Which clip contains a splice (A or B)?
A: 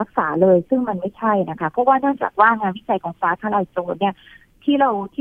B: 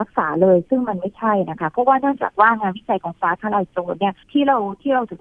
B